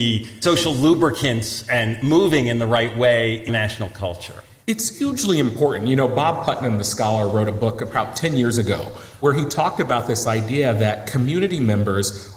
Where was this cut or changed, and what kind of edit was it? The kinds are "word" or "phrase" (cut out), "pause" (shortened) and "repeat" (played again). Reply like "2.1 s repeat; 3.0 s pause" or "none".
3.5 s word

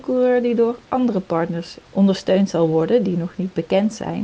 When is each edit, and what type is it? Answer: none

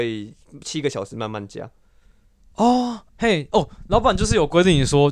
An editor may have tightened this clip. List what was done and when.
3.1 s pause

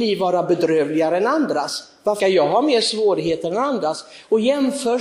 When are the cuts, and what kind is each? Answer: 2.2 s word

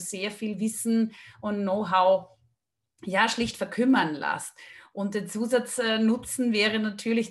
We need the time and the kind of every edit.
none

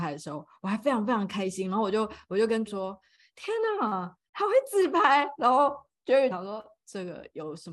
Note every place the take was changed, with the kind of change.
2.7 s word; 6.3 s phrase

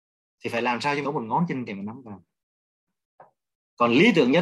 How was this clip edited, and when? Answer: 1.0 s word; 1.7 s word

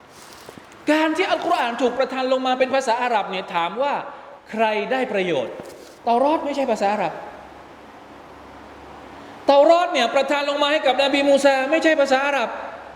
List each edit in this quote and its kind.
4.4 s pause; 6.0 s pause

